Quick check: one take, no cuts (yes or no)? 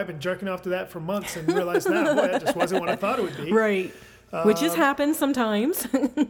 yes